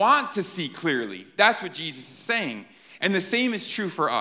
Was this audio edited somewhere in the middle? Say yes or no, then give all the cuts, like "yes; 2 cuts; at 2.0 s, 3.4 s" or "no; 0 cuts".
no; 0 cuts